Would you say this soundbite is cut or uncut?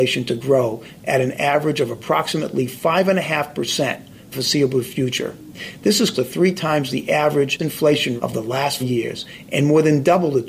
cut